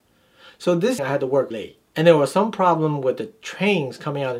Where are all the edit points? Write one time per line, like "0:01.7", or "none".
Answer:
0:01.0
0:01.5
0:01.9